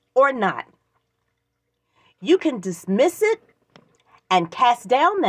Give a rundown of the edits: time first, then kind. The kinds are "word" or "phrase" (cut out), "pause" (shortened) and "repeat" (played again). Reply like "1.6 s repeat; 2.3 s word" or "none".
none